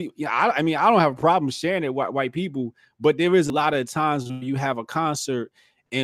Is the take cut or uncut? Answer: uncut